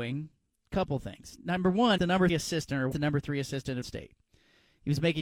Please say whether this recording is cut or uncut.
cut